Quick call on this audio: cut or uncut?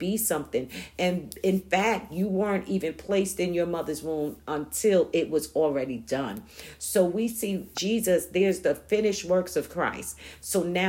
cut